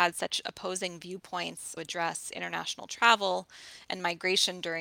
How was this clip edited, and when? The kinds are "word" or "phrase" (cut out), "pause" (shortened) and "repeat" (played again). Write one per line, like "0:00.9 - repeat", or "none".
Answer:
0:01.8 - phrase